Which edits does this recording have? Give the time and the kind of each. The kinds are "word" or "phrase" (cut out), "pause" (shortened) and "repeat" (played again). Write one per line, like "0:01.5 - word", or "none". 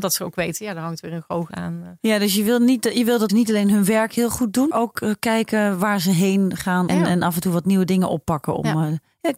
0:01.5 - word
0:03.3 - word
0:04.7 - word
0:06.9 - word